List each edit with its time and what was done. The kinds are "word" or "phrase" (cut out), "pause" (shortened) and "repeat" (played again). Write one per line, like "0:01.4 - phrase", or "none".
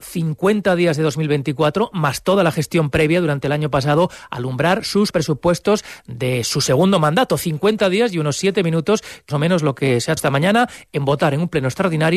0:05.1 - word
0:09.3 - phrase
0:10.2 - word

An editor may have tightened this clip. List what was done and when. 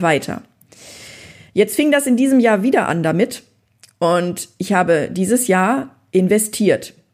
none

